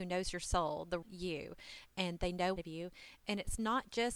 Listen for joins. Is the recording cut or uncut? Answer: cut